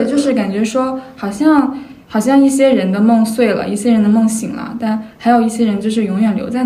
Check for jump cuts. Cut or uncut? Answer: cut